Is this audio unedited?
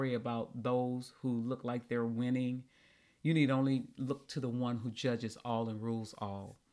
yes; 0 cuts

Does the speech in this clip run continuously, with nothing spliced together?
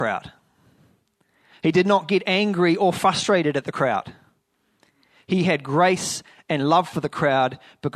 yes; 0 cuts

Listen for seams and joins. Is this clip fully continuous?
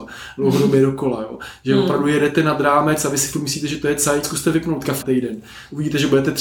no; 2 cuts; at 4.2 s, 5.0 s

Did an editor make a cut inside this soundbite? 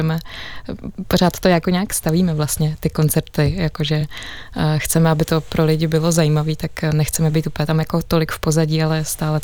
no; 0 cuts

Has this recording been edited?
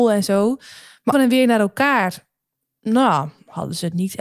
yes; 1 cut; at 1.1 s

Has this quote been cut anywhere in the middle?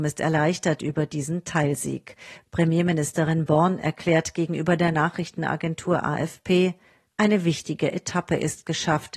no; 0 cuts

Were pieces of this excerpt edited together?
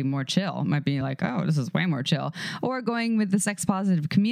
no; 0 cuts

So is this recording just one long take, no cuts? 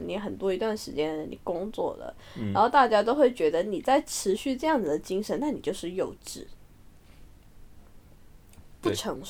yes; 0 cuts

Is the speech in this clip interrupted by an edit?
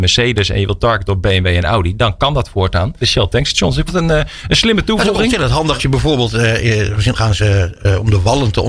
yes; 4 cuts; at 3.0 s, 3.9 s, 5.8 s, 7.1 s

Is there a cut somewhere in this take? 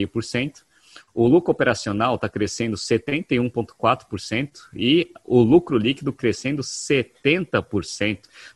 no; 0 cuts

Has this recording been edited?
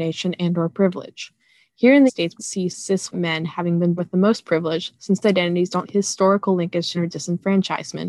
yes; 8 cuts; at 2.1 s, 2.4 s, 2.7 s, 3.1 s, 4.0 s, 5.2 s, 5.8 s, 6.9 s

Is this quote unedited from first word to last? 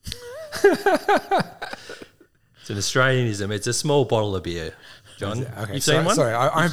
yes; 0 cuts

